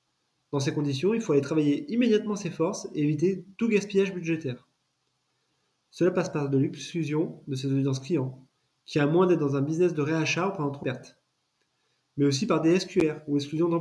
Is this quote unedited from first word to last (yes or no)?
no